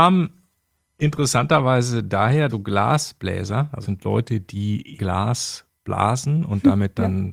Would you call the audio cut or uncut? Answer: cut